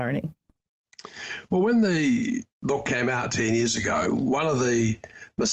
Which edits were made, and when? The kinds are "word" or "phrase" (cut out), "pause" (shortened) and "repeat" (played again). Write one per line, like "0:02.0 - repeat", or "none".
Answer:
0:02.5 - pause